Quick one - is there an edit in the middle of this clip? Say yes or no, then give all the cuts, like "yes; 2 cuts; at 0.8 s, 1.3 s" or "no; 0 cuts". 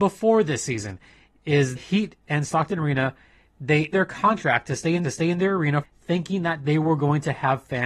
yes; 4 cuts; at 1.8 s, 3.9 s, 5.0 s, 5.8 s